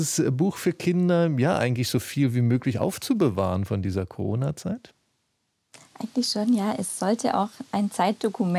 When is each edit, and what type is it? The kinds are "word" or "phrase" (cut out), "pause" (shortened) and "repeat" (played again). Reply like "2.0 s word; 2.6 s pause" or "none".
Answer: none